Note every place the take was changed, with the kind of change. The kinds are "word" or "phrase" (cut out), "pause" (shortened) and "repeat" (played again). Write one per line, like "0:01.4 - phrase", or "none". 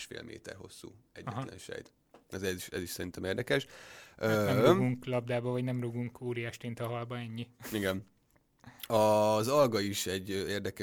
none